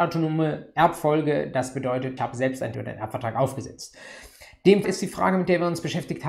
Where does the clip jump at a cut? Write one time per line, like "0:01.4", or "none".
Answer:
0:02.2
0:02.7
0:04.8